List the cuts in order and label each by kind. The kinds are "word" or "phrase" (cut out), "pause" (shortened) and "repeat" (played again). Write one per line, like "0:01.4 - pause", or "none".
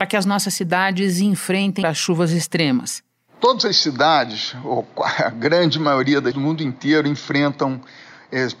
0:01.8 - word
0:06.3 - word